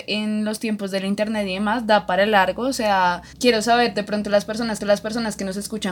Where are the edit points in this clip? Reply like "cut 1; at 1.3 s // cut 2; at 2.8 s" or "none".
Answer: cut 1; at 3.3 s // cut 2; at 4.8 s